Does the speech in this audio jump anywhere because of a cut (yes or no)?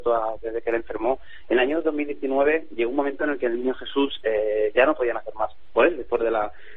no